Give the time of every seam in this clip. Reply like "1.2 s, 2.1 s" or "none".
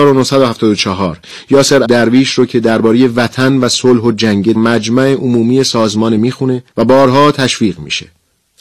1.8 s, 4.5 s, 6.2 s, 6.7 s